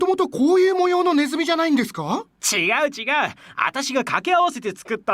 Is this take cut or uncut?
uncut